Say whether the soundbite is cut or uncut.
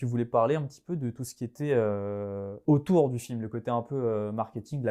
uncut